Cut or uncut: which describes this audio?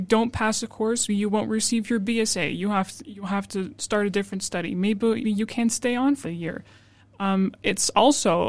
cut